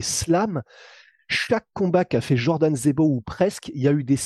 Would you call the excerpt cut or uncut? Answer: uncut